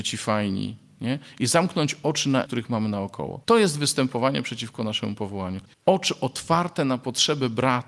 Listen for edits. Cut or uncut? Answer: cut